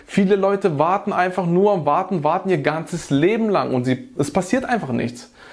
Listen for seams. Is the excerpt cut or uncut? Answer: uncut